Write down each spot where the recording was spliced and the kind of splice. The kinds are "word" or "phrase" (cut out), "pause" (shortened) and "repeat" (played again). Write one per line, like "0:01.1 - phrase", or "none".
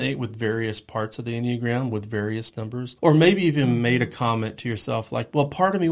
0:03.0 - pause